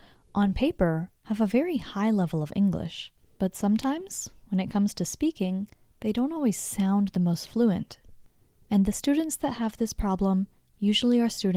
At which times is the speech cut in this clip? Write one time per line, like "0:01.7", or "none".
none